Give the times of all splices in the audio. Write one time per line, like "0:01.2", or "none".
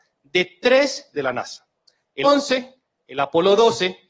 0:01.1
0:02.2